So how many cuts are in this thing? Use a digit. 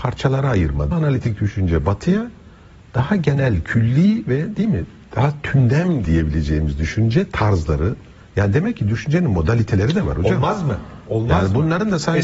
2